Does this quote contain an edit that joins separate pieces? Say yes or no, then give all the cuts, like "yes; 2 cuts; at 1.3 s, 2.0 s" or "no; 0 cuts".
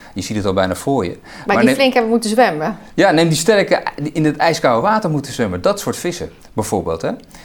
no; 0 cuts